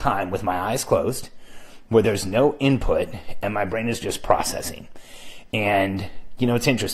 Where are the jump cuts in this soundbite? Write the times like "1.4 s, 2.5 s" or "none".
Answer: none